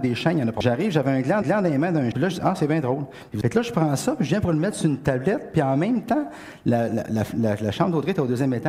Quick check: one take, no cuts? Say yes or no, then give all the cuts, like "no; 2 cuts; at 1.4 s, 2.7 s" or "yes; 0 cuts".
no; 2 cuts; at 1.4 s, 2.1 s